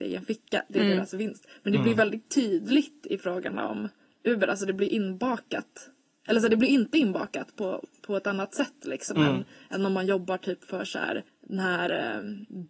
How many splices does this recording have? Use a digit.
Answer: 1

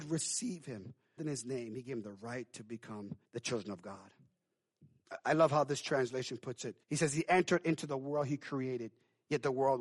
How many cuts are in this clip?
3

